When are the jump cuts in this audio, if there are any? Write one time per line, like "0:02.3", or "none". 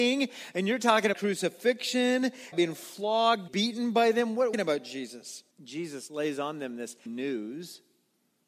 0:01.1
0:02.5
0:03.5
0:04.5
0:05.5
0:07.1